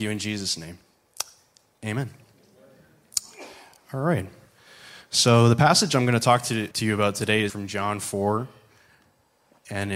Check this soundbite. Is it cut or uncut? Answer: cut